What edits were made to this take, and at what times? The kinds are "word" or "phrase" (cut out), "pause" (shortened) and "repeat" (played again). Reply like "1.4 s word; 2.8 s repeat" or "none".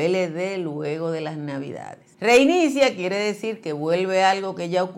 2.1 s pause